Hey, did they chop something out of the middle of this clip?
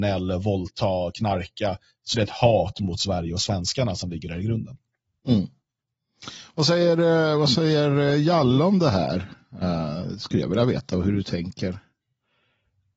yes; 1 cut; at 2.1 s

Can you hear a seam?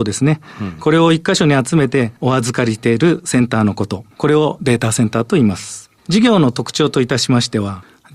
yes; 2 cuts; at 2.2 s, 4.1 s

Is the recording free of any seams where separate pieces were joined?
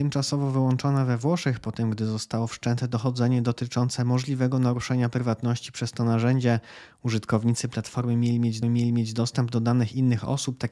no; 1 cut; at 8.6 s

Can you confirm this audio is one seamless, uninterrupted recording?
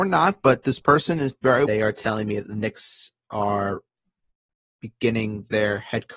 no; 1 cut; at 1.7 s

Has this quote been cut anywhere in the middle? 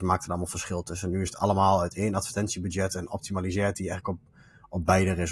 no; 0 cuts

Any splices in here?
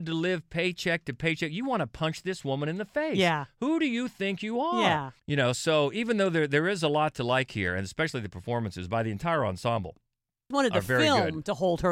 yes; 2 cuts; at 5.2 s, 10.5 s

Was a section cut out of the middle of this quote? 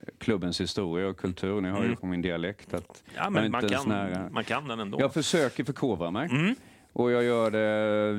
yes; 1 cut; at 2.0 s

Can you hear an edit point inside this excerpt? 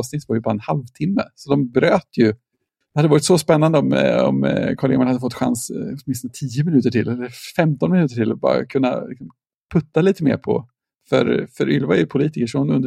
no; 0 cuts

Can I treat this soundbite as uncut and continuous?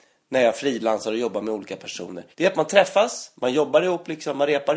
no; 1 cut; at 2.3 s

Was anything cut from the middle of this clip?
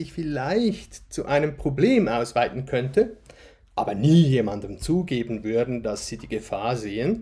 no; 0 cuts

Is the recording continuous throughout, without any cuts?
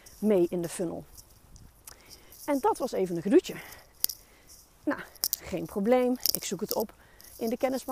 yes; 0 cuts

